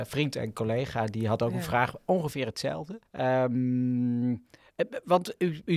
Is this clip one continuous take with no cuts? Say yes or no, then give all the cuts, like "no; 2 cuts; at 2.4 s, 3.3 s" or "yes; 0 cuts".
no; 1 cut; at 3.1 s